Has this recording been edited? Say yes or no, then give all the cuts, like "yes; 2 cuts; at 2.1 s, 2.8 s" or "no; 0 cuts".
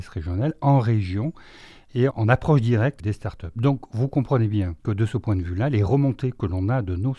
yes; 3 cuts; at 2.1 s, 3.0 s, 4.8 s